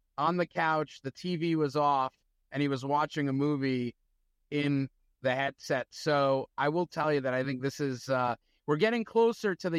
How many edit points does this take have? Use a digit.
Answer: 0